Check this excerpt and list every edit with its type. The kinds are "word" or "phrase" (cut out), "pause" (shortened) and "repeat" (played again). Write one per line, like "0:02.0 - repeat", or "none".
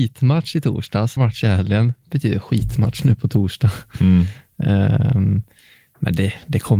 0:01.2 - word